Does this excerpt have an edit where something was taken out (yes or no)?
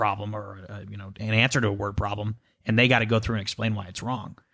no